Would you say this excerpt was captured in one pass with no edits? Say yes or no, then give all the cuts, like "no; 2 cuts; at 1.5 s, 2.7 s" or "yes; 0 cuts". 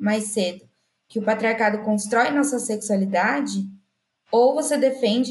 yes; 0 cuts